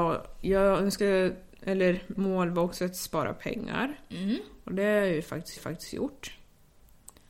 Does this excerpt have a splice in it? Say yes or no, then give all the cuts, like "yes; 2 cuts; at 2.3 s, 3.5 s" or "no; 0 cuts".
yes; 3 cuts; at 1.0 s, 2.2 s, 5.6 s